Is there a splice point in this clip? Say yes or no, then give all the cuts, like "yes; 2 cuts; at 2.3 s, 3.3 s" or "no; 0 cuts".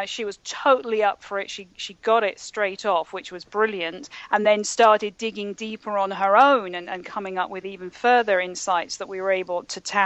no; 0 cuts